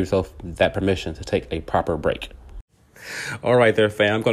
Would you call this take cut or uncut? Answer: uncut